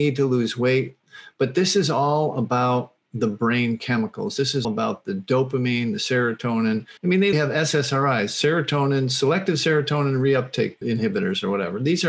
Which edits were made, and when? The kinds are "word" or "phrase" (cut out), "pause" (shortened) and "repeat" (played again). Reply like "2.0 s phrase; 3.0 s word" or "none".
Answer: 4.6 s word; 7.0 s pause; 7.3 s word; 10.8 s word